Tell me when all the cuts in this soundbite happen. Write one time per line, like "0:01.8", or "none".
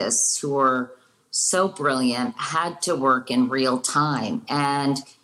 none